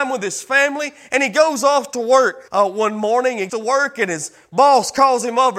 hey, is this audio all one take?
no; 2 cuts; at 2.5 s, 3.5 s

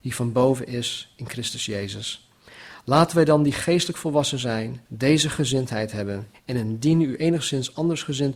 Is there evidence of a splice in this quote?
yes; 2 cuts; at 4.8 s, 6.3 s

